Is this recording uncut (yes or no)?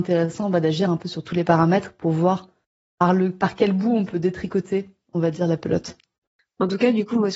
yes